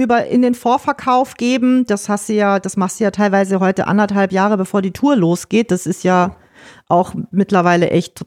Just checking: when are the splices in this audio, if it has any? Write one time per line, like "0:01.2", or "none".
none